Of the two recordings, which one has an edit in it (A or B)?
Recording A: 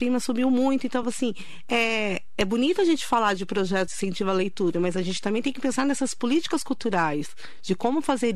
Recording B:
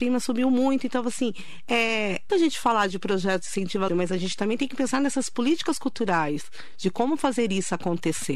B